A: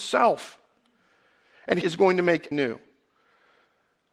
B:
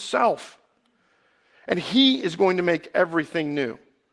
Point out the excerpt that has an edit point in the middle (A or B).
A